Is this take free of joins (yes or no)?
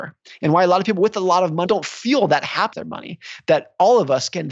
no